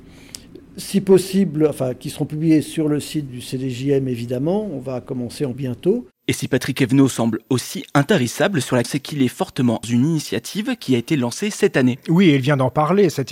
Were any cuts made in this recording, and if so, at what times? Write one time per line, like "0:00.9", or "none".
0:03.3
0:05.5
0:08.8
0:09.8